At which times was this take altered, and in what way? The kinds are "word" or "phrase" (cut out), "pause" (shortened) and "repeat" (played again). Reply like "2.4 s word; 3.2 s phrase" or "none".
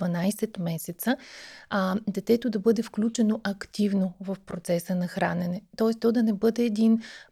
none